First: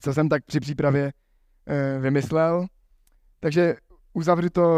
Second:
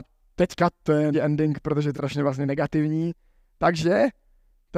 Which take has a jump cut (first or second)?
second